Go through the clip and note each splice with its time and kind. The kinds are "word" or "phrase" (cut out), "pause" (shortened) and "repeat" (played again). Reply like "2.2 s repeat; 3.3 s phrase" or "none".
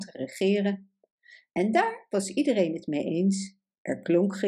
none